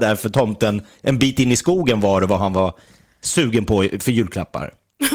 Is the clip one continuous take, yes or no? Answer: yes